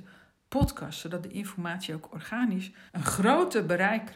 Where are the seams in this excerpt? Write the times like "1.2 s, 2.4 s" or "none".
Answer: 2.9 s